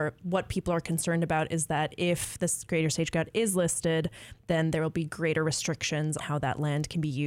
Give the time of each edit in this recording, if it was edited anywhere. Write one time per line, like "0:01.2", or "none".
0:06.2